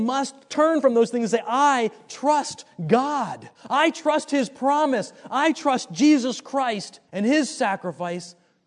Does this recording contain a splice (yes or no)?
yes